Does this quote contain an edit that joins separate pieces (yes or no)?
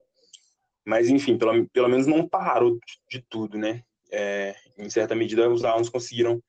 no